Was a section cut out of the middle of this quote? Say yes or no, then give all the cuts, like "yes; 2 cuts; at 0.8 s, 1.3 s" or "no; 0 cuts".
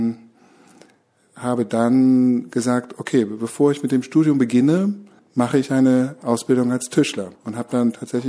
yes; 2 cuts; at 5.2 s, 7.3 s